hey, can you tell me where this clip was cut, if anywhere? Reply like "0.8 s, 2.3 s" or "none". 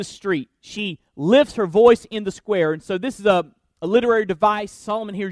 none